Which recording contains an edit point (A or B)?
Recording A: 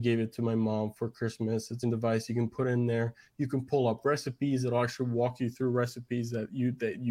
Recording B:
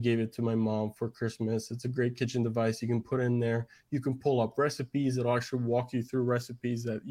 A